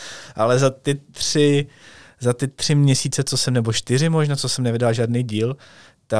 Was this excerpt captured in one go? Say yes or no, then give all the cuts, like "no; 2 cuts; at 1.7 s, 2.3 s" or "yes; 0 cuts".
yes; 0 cuts